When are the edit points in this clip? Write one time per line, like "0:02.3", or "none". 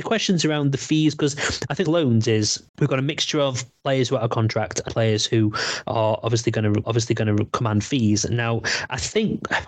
0:01.8
0:02.7
0:04.9
0:06.8